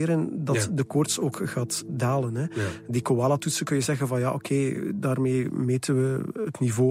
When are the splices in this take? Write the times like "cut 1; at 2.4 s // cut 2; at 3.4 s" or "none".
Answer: none